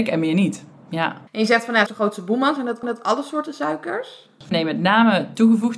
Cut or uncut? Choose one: cut